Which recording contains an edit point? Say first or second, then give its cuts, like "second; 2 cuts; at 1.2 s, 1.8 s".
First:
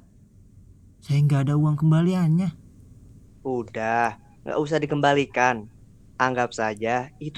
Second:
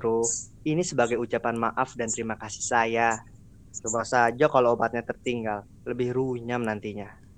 second; 1 cut; at 5.8 s